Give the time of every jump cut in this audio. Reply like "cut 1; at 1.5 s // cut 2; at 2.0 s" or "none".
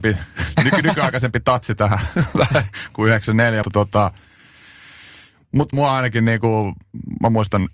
cut 1; at 3.6 s // cut 2; at 5.7 s

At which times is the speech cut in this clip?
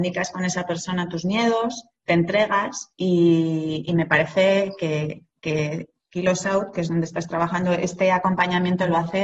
cut 1; at 2.9 s // cut 2; at 5.4 s

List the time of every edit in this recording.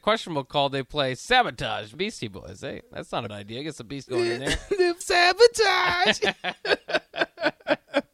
cut 1; at 1.9 s // cut 2; at 3.3 s // cut 3; at 4.1 s // cut 4; at 5.0 s

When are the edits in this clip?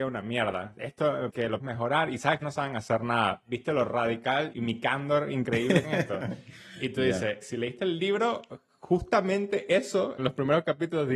cut 1; at 1.3 s // cut 2; at 1.6 s // cut 3; at 2.4 s // cut 4; at 4.5 s // cut 5; at 5.8 s // cut 6; at 7.4 s // cut 7; at 10.2 s

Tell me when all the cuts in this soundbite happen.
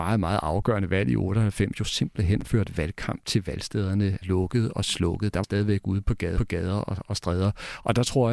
cut 1; at 4.2 s // cut 2; at 5.4 s // cut 3; at 6.4 s

